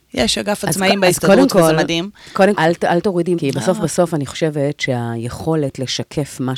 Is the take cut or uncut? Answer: cut